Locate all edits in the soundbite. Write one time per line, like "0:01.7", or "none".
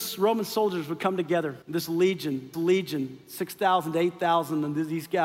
0:01.6
0:02.5